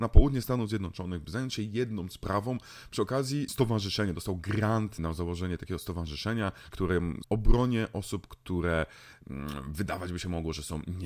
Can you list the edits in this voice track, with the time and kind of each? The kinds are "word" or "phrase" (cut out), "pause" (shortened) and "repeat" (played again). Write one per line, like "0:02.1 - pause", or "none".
0:03.5 - word
0:05.0 - word
0:06.7 - word
0:07.2 - phrase

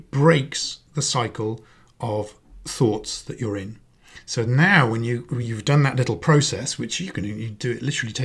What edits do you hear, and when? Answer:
none

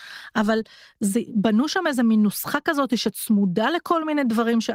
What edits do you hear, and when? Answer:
none

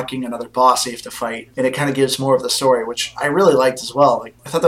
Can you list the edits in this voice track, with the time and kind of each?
none

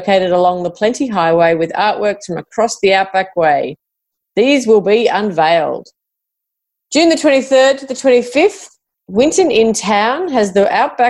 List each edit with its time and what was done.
none

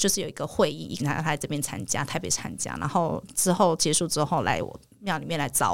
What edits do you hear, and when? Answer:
0:01.0 - word

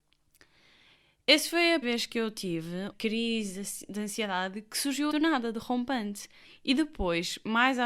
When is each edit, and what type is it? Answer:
0:01.8 - word
0:02.9 - word
0:05.1 - word
0:06.4 - pause

